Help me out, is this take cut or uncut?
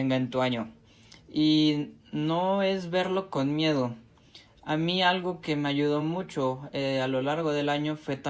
uncut